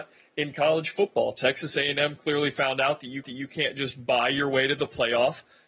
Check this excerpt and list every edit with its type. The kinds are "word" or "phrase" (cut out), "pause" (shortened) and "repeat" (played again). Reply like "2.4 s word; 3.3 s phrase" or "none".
3.2 s repeat